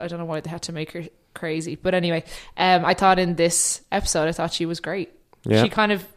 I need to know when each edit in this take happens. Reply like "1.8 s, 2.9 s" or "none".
none